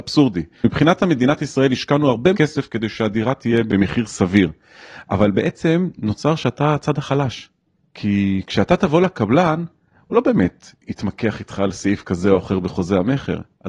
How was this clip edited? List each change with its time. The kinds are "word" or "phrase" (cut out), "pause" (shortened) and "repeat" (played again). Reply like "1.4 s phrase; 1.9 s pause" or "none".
2.3 s word